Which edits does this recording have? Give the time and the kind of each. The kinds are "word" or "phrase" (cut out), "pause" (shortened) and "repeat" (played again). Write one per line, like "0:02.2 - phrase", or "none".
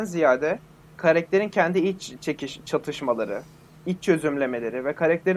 none